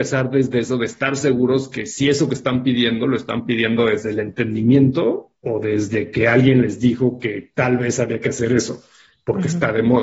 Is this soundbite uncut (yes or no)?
yes